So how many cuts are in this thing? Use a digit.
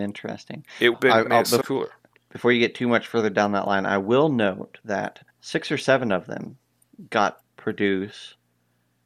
5